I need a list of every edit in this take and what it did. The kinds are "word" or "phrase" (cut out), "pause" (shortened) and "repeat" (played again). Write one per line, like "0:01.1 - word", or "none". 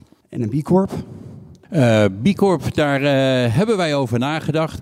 none